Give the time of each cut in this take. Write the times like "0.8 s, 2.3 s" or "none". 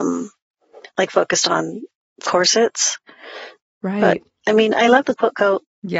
none